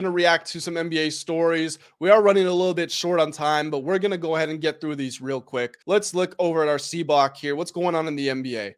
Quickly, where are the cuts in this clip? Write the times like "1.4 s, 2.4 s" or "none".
5.8 s